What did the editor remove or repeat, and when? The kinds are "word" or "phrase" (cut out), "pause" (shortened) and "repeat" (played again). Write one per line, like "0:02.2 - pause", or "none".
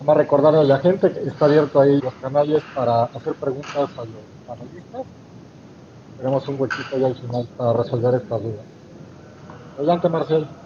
0:01.2 - word
0:02.0 - word
0:07.5 - word